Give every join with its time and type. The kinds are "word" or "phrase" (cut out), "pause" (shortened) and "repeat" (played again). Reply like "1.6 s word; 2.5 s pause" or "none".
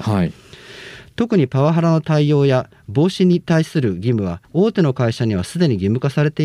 4.4 s pause